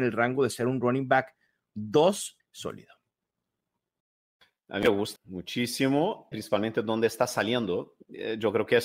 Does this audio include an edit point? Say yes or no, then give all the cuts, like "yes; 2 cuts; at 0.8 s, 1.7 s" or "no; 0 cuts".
yes; 3 cuts; at 2.4 s, 5.2 s, 6.3 s